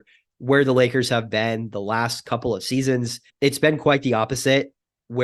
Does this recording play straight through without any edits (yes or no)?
no